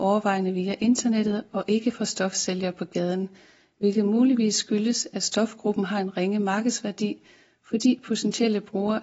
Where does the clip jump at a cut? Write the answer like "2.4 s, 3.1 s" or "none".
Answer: none